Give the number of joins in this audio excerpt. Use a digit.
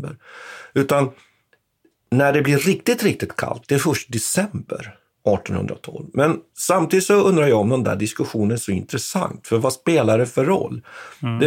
0